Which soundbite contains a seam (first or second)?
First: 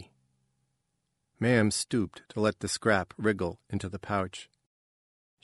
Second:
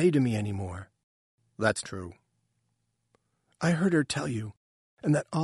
second